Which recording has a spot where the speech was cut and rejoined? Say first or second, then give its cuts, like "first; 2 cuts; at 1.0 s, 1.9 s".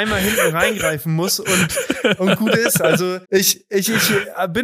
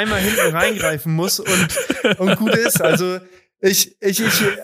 first; 1 cut; at 3.2 s